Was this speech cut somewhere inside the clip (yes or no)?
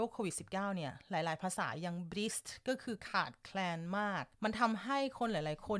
yes